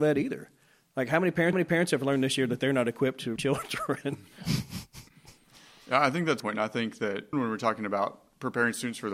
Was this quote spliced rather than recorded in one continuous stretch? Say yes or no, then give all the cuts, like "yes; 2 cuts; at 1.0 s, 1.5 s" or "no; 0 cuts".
yes; 4 cuts; at 1.5 s, 3.4 s, 6.4 s, 7.3 s